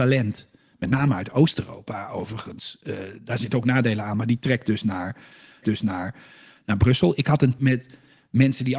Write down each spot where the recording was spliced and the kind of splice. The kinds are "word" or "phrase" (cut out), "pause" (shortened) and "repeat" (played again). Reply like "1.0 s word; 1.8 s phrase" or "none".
5.6 s repeat; 7.6 s word